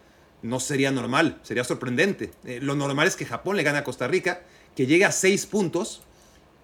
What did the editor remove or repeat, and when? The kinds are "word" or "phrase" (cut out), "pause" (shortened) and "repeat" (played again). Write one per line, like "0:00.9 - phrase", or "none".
none

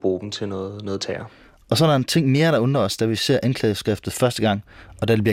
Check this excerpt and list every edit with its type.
none

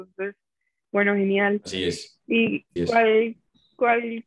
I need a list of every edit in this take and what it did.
0:02.8 - word

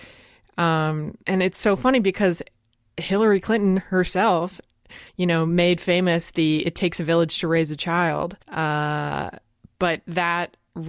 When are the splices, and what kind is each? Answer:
0:01.2 - pause
0:05.1 - pause
0:08.4 - pause

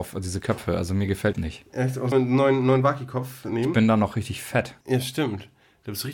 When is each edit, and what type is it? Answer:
0:01.3 - phrase
0:02.1 - word
0:04.8 - pause

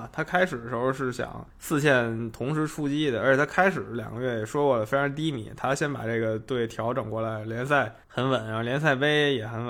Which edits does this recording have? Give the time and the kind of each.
0:01.5 - pause
0:08.0 - pause

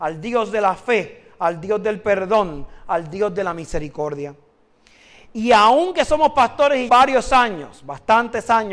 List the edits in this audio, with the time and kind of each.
0:06.9 - word

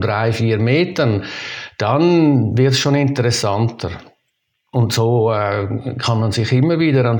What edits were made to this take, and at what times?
none

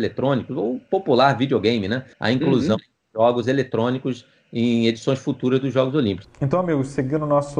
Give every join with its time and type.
0:02.1 - pause

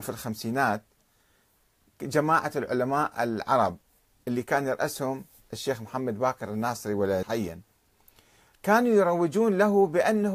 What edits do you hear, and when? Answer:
0:07.2 - word

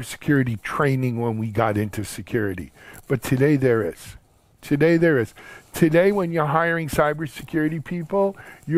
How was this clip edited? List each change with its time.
none

